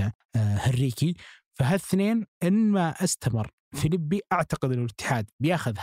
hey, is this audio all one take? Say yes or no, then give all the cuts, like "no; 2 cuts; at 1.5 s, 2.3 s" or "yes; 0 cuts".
yes; 0 cuts